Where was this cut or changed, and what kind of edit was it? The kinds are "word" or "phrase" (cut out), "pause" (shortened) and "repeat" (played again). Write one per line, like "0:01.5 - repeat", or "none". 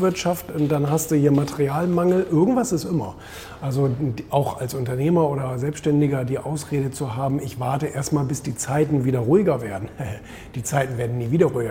none

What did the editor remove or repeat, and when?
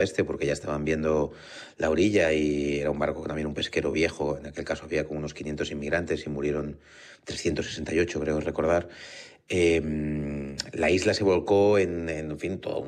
none

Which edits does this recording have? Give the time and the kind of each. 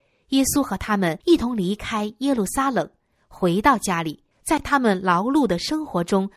0:01.2 - pause
0:04.3 - pause

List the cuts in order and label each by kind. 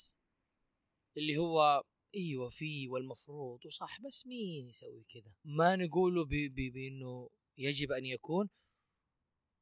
0:05.3 - pause

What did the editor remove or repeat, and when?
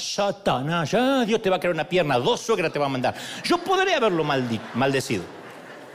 none

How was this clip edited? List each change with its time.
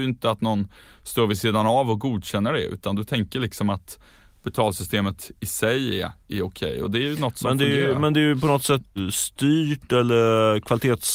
0:09.0 - word

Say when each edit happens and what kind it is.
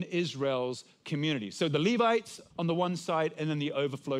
0:02.5 - pause

